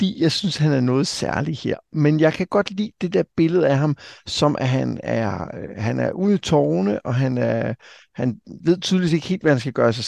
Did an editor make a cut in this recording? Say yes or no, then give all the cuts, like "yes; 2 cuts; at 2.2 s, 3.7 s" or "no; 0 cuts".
no; 0 cuts